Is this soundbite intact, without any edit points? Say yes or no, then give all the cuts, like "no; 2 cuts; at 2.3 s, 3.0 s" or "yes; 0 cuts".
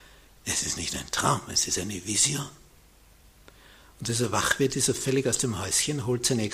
yes; 0 cuts